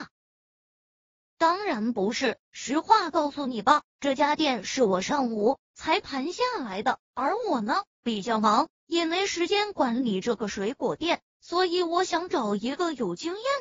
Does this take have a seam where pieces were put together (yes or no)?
no